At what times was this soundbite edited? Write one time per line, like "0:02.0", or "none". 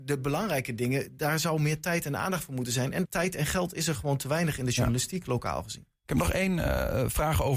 0:03.0